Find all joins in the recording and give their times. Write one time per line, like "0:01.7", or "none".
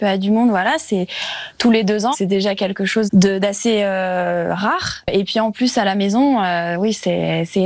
0:02.1
0:03.1